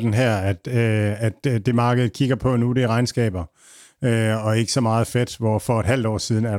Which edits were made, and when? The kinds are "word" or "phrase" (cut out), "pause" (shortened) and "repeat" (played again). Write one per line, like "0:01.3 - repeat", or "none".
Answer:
none